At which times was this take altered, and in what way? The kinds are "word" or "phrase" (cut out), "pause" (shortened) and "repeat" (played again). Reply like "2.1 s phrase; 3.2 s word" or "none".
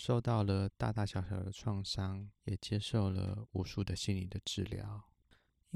2.4 s pause